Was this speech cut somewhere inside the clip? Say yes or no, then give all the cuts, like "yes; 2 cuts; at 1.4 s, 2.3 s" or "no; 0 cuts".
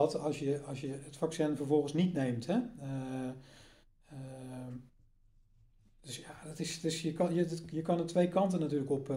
no; 0 cuts